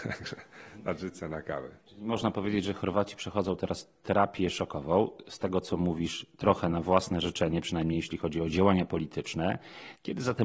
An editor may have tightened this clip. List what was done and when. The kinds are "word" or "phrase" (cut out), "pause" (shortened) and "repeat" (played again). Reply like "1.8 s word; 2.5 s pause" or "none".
none